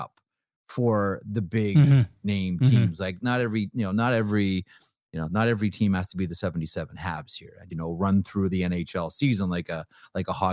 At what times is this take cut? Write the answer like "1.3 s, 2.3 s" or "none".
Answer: 7.7 s